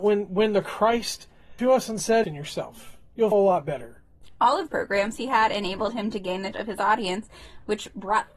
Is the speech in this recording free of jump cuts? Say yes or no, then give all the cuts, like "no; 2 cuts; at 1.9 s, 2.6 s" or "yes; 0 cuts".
no; 5 cuts; at 1.6 s, 2.2 s, 3.3 s, 4.7 s, 6.5 s